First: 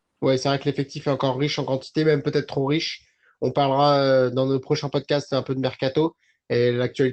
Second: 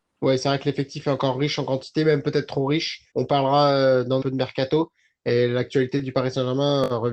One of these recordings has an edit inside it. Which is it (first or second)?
second